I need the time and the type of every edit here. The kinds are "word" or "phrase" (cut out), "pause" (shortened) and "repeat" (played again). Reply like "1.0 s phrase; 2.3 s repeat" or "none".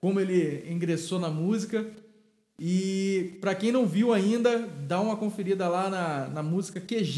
none